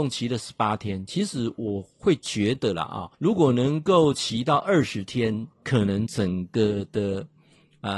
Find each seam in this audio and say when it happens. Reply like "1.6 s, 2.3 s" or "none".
3.1 s, 5.5 s

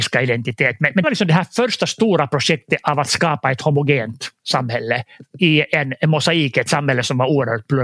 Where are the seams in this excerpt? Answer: 1.0 s, 5.4 s

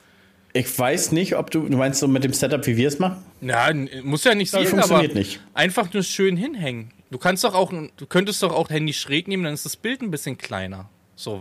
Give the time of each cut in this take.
3.3 s, 4.5 s, 7.9 s, 8.7 s

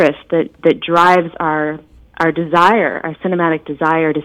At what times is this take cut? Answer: none

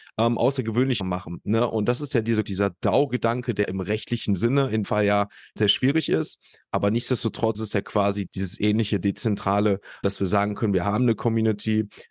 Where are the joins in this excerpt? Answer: 1.0 s, 2.4 s, 3.6 s, 4.8 s, 5.6 s, 7.5 s, 8.3 s, 10.0 s

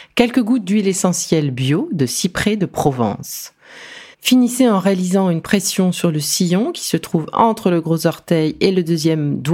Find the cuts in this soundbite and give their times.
4.1 s

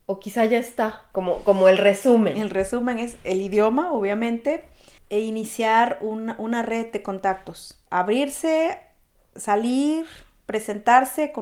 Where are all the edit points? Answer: 7.9 s

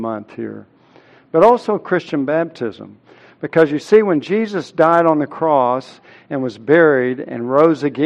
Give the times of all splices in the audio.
none

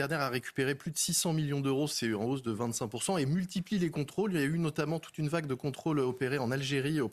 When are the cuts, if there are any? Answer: none

